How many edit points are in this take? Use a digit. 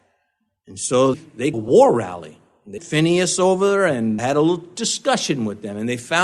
4